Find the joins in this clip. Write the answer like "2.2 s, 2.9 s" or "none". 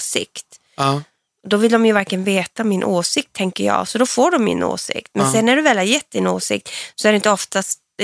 none